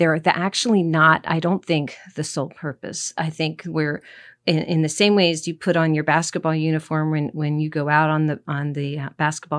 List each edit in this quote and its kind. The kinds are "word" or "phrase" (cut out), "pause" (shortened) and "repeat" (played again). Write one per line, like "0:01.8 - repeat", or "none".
none